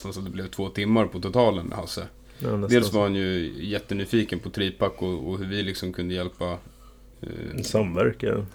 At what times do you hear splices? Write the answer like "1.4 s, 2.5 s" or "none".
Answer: none